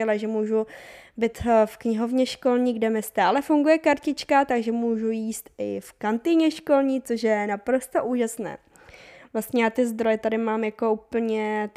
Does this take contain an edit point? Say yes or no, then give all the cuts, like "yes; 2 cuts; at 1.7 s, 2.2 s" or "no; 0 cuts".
no; 0 cuts